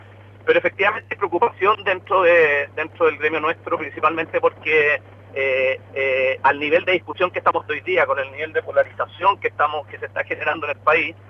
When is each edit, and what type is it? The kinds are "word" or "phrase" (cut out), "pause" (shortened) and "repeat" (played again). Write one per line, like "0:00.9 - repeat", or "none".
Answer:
0:05.8 - repeat
0:07.7 - word